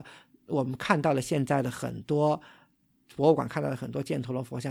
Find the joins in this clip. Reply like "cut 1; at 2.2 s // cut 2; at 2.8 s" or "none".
none

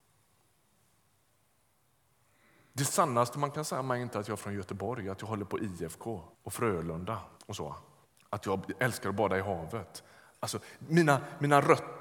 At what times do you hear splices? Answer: cut 1; at 6.3 s // cut 2; at 7.3 s // cut 3; at 8.0 s

